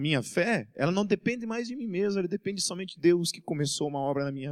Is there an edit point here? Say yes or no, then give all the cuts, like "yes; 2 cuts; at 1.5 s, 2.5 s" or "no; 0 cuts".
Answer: yes; 1 cut; at 3.0 s